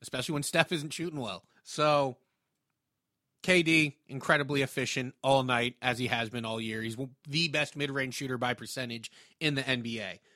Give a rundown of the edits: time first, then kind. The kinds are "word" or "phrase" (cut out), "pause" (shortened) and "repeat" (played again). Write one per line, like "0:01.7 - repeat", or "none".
0:01.5 - pause